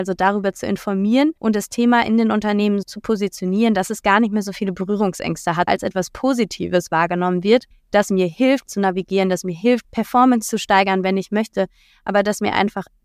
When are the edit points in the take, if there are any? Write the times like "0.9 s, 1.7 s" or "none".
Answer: 1.4 s, 2.8 s, 5.7 s, 7.7 s, 8.7 s, 9.8 s